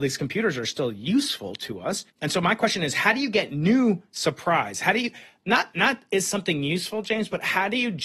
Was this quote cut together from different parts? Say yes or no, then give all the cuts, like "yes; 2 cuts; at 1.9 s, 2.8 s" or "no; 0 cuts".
yes; 1 cut; at 2.1 s